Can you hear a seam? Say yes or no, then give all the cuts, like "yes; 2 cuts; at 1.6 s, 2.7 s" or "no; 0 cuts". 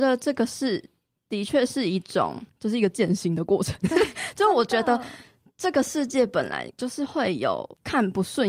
no; 0 cuts